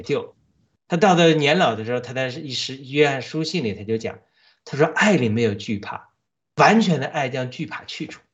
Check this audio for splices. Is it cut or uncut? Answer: cut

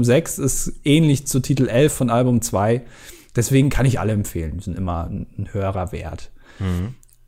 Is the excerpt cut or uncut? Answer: uncut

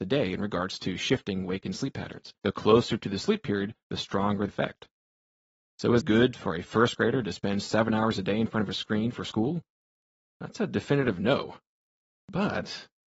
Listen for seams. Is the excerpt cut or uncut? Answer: cut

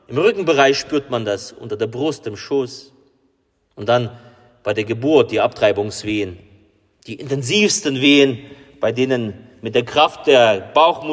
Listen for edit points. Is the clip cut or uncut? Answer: uncut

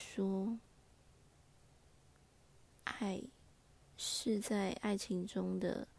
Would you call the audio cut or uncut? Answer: uncut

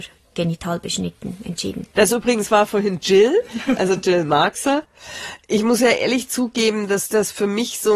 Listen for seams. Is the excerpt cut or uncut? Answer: cut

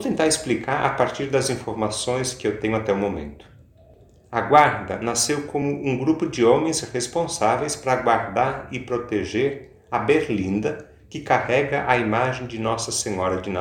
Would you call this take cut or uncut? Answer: uncut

